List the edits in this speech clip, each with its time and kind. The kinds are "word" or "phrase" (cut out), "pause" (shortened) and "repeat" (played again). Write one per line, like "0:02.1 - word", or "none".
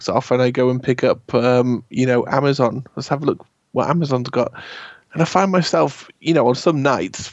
none